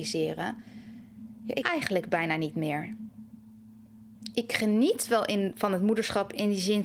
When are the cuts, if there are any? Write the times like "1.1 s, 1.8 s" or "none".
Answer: 1.6 s

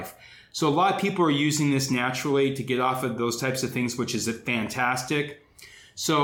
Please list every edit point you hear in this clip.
none

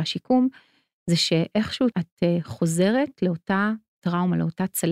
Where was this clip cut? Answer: 1.9 s

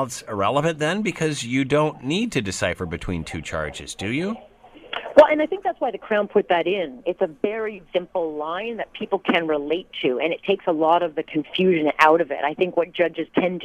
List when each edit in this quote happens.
7.8 s

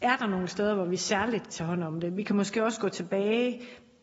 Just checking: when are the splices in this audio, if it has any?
1.5 s

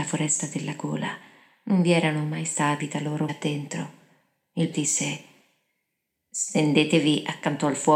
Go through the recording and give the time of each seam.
2.8 s, 3.3 s, 4.7 s

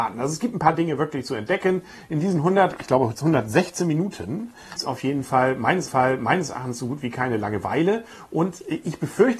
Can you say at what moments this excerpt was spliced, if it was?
4.8 s, 5.9 s

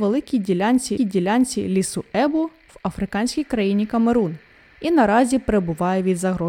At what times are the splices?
1.0 s

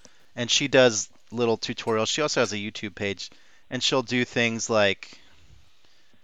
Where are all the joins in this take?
none

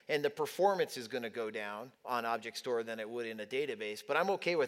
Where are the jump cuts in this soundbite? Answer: 1.9 s

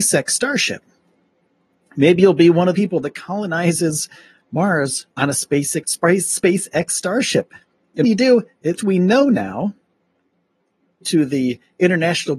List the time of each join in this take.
2.7 s, 5.1 s, 5.8 s, 8.0 s, 8.8 s, 11.0 s

